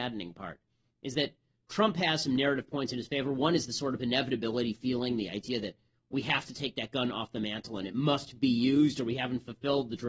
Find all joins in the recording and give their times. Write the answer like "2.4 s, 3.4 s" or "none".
none